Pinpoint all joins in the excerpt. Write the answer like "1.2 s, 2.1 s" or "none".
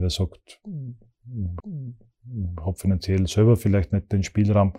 1.6 s